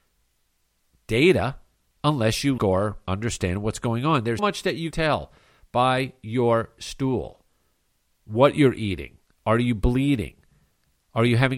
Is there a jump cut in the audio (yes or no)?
yes